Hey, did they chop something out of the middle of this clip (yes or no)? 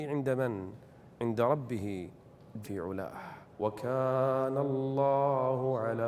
yes